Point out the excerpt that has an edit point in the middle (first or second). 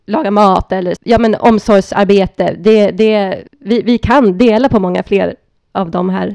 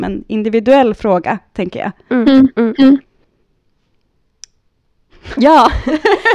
first